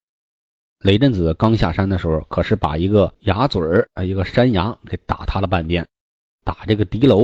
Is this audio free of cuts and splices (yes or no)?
yes